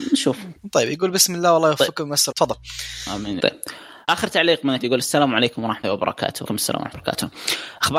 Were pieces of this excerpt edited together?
yes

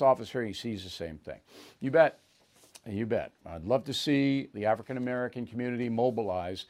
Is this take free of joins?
yes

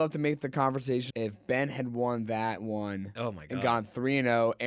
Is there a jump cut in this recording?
yes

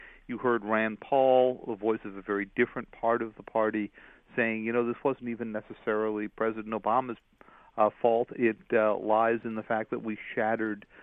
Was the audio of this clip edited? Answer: no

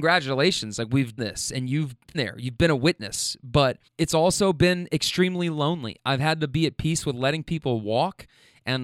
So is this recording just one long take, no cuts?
no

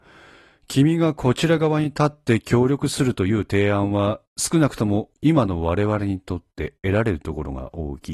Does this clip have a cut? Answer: no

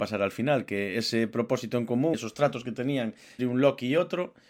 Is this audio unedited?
no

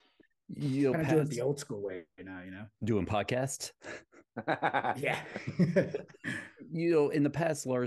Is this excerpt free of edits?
no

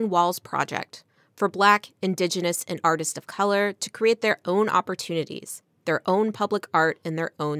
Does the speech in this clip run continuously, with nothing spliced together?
yes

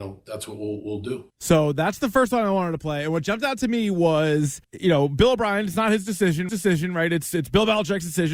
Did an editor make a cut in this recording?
yes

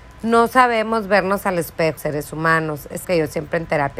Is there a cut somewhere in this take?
yes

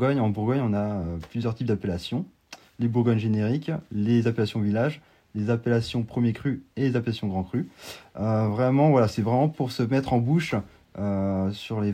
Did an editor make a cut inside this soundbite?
no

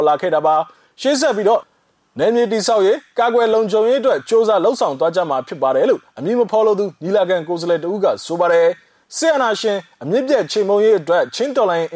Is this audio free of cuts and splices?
yes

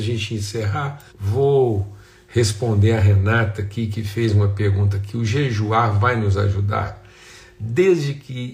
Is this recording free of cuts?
no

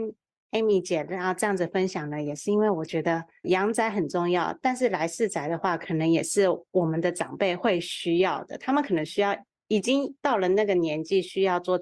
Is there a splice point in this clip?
no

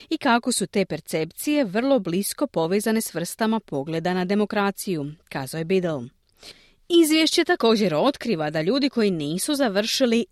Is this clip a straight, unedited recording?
yes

